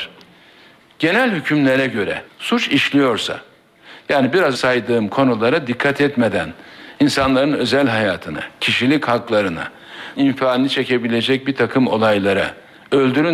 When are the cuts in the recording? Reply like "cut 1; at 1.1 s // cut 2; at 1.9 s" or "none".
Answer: cut 1; at 2.3 s // cut 2; at 4.5 s // cut 3; at 10.2 s